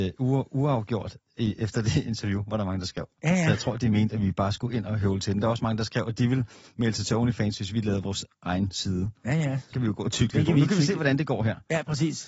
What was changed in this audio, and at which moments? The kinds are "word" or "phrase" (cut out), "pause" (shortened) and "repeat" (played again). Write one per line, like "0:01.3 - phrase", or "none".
0:09.7 - word